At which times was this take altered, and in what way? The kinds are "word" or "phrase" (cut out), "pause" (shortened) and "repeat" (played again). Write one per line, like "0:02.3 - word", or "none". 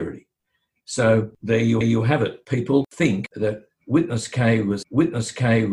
0:01.8 - repeat
0:04.8 - repeat